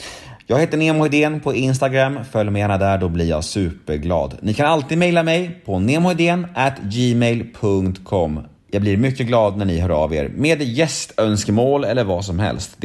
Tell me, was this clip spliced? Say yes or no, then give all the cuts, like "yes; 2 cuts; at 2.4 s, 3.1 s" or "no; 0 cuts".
no; 0 cuts